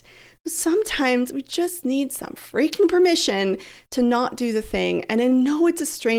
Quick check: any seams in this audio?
no; 0 cuts

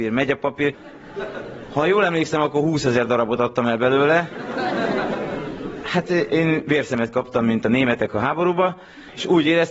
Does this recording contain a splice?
no; 0 cuts

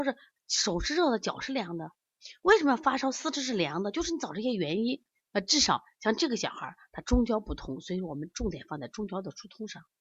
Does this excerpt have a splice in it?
no; 0 cuts

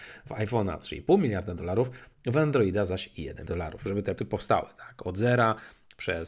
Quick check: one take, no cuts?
no; 2 cuts; at 3.5 s, 4.2 s

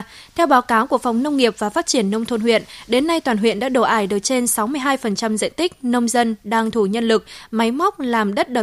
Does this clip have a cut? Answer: yes; 1 cut; at 6.7 s

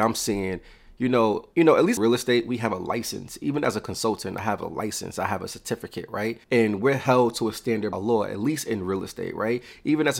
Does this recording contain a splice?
yes; 4 cuts; at 1.5 s, 2.0 s, 6.4 s, 7.9 s

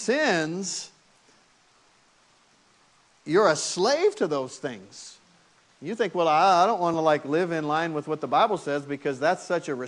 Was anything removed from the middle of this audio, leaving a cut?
no; 0 cuts

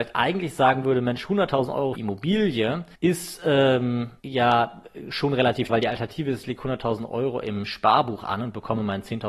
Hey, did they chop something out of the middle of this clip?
yes; 4 cuts; at 1.9 s, 2.9 s, 4.2 s, 5.7 s

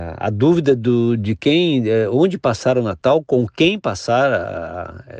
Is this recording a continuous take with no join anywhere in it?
yes; 0 cuts

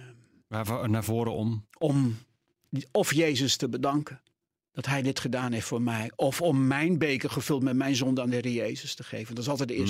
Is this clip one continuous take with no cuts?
yes; 0 cuts

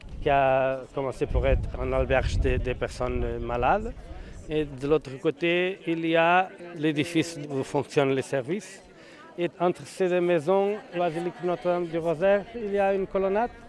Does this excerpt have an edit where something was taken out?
yes; 4 cuts; at 1.7 s, 2.6 s, 7.4 s, 11.0 s

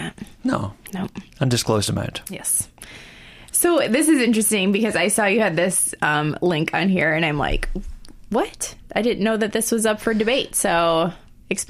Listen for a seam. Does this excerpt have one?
no; 0 cuts

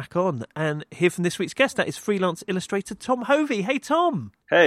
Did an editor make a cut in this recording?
no; 0 cuts

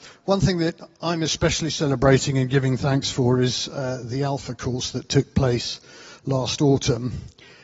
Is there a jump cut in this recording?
no; 0 cuts

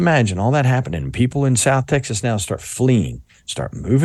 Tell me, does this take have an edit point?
no; 0 cuts

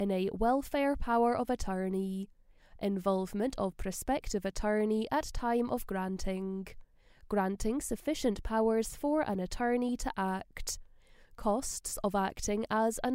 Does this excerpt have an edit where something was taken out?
no; 0 cuts

